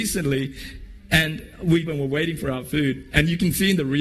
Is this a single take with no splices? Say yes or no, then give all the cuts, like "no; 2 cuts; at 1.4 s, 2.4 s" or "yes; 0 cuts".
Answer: no; 1 cut; at 1.9 s